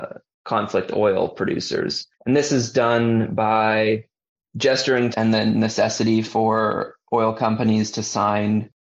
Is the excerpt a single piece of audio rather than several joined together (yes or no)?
no